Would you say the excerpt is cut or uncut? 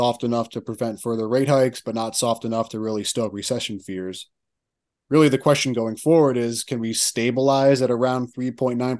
uncut